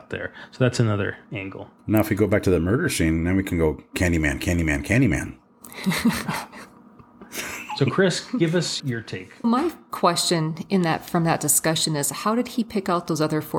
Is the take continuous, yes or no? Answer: no